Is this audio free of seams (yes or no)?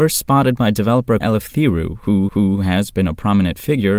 no